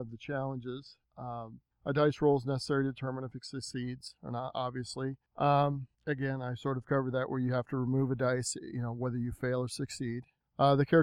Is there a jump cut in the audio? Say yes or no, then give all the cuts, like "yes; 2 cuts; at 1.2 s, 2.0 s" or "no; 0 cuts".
yes; 1 cut; at 5.9 s